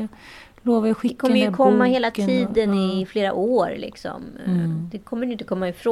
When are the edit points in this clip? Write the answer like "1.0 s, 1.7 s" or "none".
none